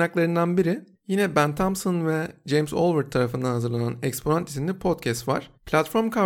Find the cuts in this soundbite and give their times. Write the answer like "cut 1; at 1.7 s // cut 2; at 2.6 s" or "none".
none